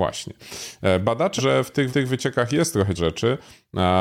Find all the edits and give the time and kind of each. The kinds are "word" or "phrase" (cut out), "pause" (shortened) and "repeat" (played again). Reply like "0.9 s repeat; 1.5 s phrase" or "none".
1.4 s word; 1.9 s repeat; 3.0 s word